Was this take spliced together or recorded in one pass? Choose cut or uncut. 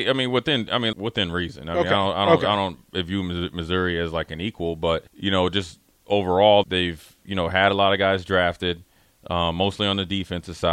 cut